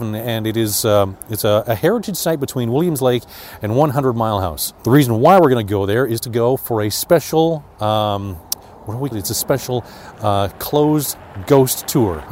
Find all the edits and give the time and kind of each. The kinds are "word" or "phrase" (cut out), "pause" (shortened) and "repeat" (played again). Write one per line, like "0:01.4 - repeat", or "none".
0:07.7 - pause
0:09.1 - word